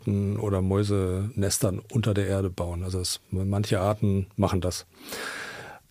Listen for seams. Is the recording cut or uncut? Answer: uncut